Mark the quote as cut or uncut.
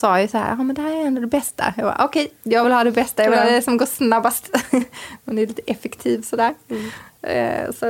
uncut